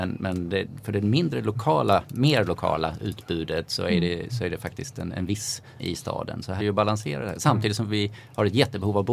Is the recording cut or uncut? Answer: cut